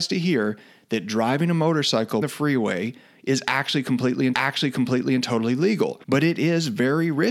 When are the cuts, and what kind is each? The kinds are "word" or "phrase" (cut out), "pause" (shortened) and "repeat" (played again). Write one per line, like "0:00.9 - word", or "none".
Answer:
0:02.2 - phrase
0:04.3 - repeat
0:06.0 - pause

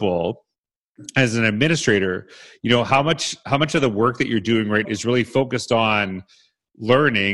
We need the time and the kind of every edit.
0:04.8 - word

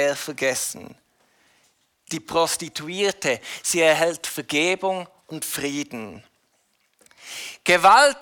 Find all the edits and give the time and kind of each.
none

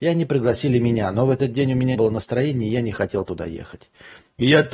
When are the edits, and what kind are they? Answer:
0:01.9 - word

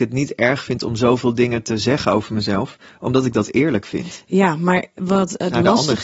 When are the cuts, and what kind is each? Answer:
none

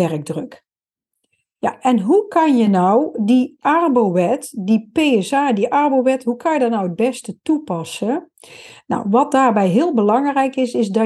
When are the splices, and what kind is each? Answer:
none

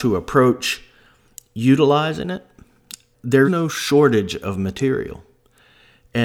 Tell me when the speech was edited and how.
0:03.1 - word
0:03.4 - word

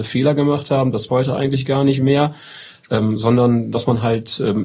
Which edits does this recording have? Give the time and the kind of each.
0:01.1 - word

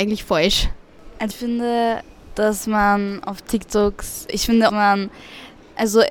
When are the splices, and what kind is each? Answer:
0:01.3 - word
0:04.3 - word
0:04.7 - phrase

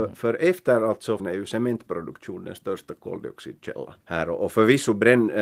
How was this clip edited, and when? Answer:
0:01.2 - phrase
0:04.0 - pause

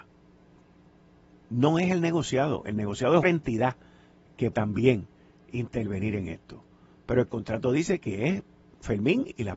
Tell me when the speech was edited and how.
0:03.2 - word
0:04.5 - word

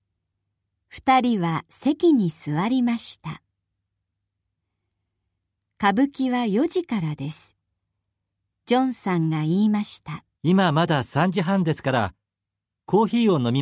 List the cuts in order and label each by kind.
0:10.3 - pause

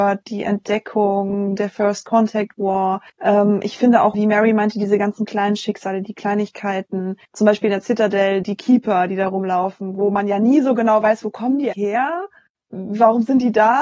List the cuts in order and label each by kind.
0:03.1 - pause
0:04.1 - word
0:07.2 - pause
0:08.4 - word
0:11.7 - word

